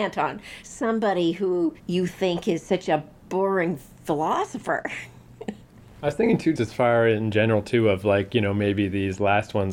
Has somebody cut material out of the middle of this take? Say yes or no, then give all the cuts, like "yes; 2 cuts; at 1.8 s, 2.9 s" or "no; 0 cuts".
yes; 2 cuts; at 1.8 s, 6.6 s